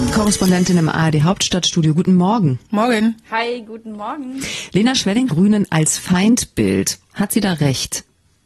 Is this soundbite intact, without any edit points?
no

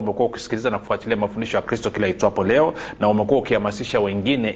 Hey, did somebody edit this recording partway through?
no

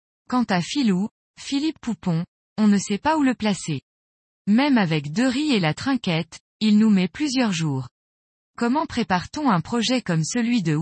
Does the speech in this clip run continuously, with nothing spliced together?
yes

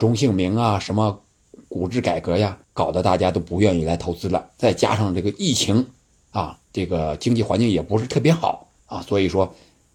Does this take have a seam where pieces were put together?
yes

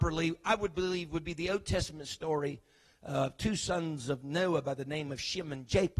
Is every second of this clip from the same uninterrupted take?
yes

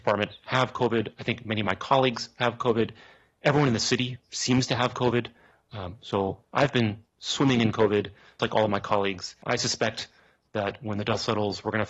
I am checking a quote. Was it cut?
yes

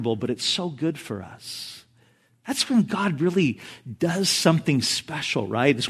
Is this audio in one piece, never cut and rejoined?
yes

